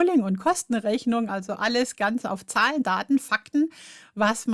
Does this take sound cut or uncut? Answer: uncut